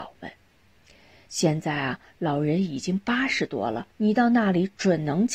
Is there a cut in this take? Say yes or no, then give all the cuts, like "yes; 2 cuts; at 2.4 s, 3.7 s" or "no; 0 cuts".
yes; 1 cut; at 3.9 s